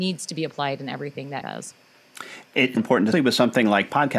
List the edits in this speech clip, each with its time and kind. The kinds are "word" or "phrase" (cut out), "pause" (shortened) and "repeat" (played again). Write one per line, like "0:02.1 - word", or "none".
0:01.4 - word
0:02.8 - word
0:03.1 - phrase